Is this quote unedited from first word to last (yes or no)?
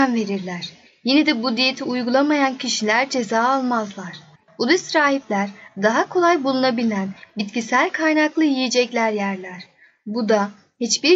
yes